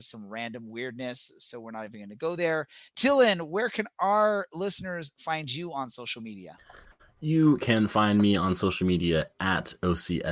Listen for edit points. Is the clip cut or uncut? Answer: uncut